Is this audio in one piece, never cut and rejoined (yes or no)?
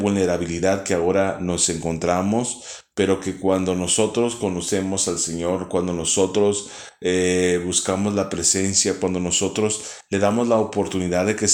yes